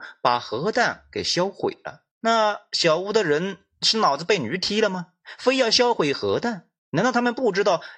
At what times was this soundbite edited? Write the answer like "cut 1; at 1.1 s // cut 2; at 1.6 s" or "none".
cut 1; at 2.1 s // cut 2; at 6.8 s